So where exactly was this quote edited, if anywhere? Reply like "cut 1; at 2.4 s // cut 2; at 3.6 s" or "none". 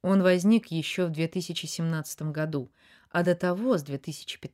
none